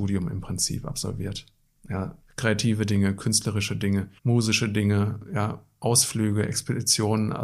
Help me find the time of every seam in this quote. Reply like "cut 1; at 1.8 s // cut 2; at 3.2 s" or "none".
cut 1; at 2.2 s // cut 2; at 4.2 s